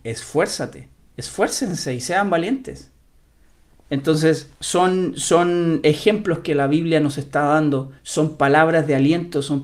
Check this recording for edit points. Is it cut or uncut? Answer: cut